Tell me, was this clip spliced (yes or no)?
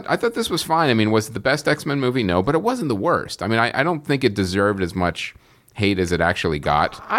no